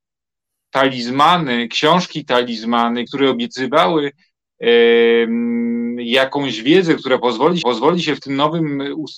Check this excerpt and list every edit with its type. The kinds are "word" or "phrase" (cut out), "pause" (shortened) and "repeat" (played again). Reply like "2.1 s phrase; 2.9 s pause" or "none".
3.1 s word; 7.6 s repeat